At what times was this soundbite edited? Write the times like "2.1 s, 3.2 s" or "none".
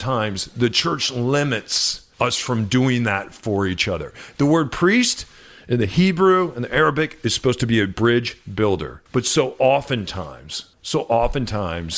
2.1 s, 9.1 s, 10.7 s